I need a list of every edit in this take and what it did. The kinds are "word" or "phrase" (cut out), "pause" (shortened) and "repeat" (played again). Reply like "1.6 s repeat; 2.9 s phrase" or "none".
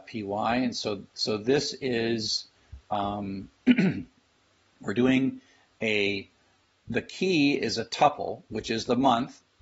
1.1 s pause; 3.5 s pause; 6.6 s pause